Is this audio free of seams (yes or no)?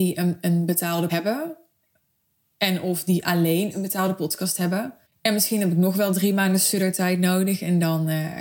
no